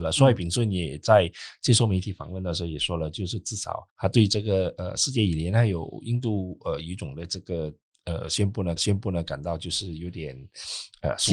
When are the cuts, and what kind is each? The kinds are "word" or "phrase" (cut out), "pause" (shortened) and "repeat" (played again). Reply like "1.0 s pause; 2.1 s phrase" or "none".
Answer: 3.9 s pause; 8.8 s repeat